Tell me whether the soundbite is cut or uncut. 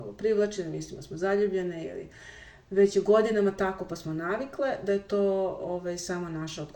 uncut